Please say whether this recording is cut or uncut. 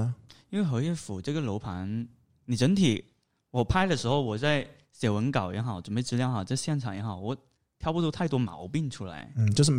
uncut